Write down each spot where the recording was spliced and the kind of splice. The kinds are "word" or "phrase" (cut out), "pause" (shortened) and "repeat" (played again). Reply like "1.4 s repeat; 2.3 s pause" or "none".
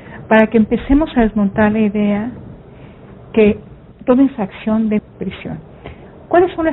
3.9 s word; 5.0 s word